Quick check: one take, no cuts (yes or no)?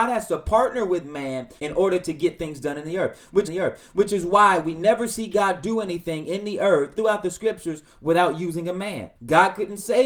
no